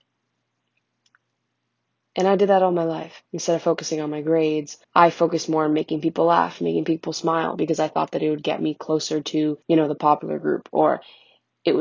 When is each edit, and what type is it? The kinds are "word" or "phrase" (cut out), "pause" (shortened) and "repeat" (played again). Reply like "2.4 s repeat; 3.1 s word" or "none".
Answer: 3.3 s pause; 4.8 s pause; 9.6 s pause